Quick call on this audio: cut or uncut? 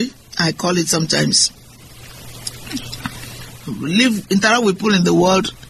uncut